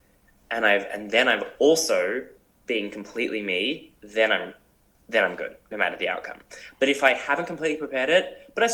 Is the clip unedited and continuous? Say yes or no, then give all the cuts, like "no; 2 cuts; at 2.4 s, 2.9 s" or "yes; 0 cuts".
yes; 0 cuts